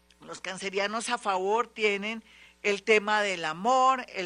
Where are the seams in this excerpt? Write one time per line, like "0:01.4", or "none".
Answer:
none